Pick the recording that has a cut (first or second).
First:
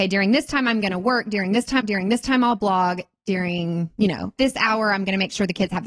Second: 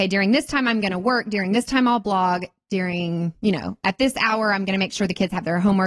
first